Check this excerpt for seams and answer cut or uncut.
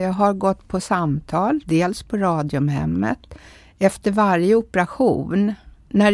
uncut